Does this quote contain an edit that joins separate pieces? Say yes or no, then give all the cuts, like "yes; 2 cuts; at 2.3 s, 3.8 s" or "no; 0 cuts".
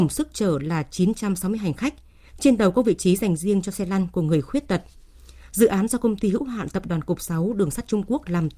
no; 0 cuts